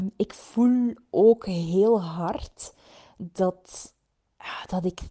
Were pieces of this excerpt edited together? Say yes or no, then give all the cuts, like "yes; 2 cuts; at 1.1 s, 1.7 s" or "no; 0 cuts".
no; 0 cuts